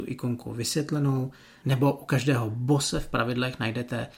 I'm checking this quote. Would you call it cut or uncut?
uncut